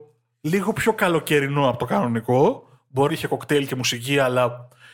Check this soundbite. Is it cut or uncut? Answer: cut